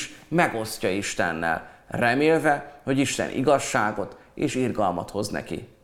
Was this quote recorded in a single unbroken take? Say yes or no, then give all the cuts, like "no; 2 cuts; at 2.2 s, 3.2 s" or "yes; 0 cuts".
yes; 0 cuts